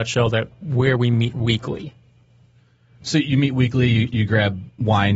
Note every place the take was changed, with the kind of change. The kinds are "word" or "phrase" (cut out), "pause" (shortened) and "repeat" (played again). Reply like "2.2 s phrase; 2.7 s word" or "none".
none